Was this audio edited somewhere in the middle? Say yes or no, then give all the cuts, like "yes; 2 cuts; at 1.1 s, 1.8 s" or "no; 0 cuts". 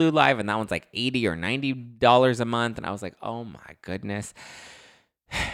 no; 0 cuts